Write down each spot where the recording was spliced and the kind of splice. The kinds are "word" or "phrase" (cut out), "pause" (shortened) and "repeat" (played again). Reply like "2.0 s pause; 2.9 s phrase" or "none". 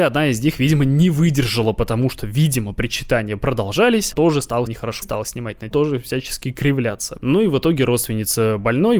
4.1 s word; 4.7 s word; 5.0 s word; 5.7 s word